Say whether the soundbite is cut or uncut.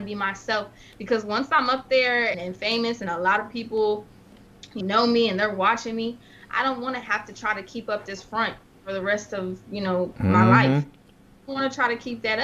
cut